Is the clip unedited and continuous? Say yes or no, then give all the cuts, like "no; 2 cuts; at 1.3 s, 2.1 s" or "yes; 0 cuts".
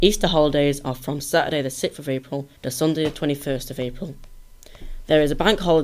no; 1 cut; at 2.6 s